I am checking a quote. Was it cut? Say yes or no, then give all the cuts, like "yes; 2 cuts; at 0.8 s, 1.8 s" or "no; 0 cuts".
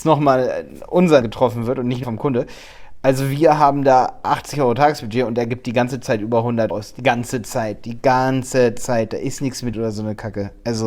yes; 4 cuts; at 1.2 s, 2.0 s, 6.7 s, 9.7 s